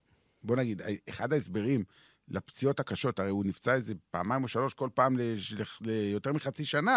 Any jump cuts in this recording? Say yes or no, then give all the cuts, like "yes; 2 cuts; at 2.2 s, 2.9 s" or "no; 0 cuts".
no; 0 cuts